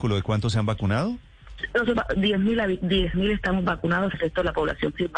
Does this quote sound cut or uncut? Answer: cut